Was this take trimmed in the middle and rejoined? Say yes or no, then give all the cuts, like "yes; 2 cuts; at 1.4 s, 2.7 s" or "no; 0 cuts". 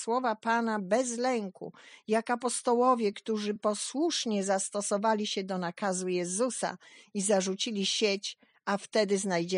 no; 0 cuts